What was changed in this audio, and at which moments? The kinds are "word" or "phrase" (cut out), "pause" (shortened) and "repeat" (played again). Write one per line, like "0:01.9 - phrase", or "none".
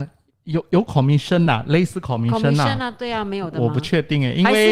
none